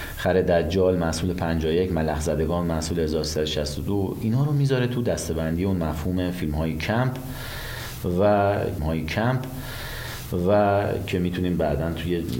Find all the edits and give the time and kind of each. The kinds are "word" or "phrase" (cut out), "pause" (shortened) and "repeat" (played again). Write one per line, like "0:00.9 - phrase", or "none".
0:08.8 - repeat